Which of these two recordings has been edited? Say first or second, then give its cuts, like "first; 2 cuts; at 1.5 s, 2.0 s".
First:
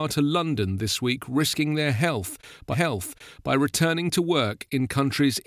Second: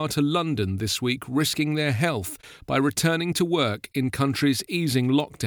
first; 1 cut; at 2.7 s